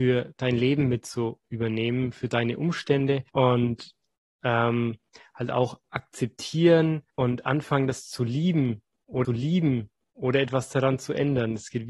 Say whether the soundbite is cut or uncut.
cut